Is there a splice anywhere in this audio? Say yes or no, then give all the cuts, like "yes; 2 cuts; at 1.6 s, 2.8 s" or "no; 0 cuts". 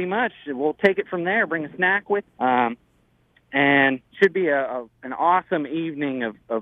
yes; 3 cuts; at 2.2 s, 4.1 s, 5.0 s